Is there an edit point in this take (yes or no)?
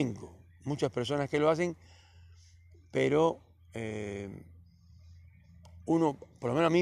no